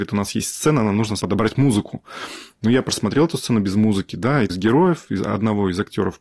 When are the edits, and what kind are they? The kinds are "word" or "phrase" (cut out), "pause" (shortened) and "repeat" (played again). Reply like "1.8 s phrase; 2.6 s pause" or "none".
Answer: 1.2 s word; 4.5 s phrase